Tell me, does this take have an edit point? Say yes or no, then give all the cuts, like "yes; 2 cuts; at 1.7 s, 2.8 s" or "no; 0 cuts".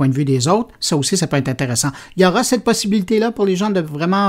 no; 0 cuts